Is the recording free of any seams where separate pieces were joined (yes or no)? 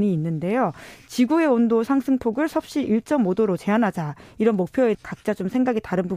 no